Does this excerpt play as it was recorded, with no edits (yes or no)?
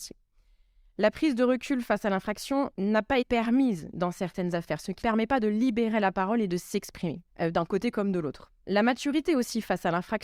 no